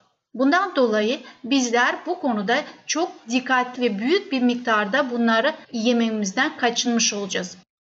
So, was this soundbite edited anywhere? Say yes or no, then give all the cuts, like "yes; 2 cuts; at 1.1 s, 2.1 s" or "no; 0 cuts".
yes; 2 cuts; at 3.8 s, 5.6 s